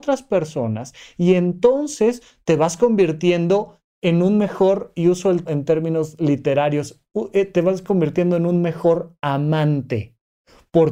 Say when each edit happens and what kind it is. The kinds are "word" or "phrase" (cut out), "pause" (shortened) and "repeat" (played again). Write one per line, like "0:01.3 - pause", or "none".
0:05.5 - word